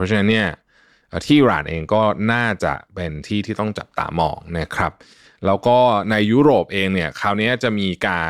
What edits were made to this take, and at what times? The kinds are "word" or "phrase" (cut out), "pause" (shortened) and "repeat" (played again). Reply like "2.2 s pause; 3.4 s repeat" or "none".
none